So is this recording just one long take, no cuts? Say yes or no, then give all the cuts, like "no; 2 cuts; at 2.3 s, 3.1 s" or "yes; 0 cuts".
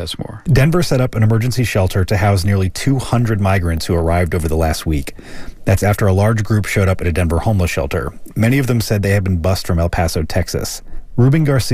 yes; 0 cuts